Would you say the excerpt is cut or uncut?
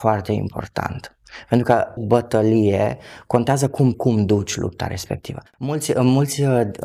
cut